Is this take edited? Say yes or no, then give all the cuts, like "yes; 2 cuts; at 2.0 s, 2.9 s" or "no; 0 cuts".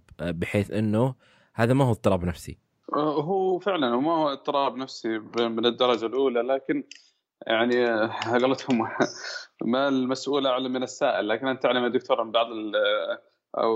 no; 0 cuts